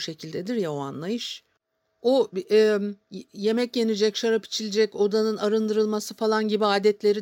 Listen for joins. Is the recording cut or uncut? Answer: uncut